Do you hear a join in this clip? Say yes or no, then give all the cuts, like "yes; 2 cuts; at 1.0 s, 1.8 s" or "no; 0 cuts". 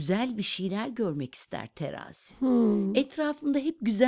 no; 0 cuts